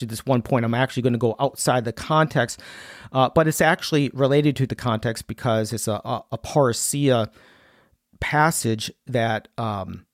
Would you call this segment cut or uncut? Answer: uncut